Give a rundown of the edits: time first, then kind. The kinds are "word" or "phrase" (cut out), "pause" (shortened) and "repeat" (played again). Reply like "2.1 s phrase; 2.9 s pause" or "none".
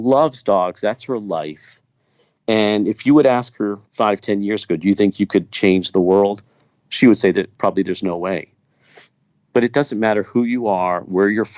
3.9 s pause